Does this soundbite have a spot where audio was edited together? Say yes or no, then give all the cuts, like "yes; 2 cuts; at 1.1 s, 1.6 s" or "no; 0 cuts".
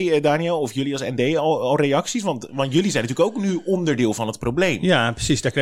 no; 0 cuts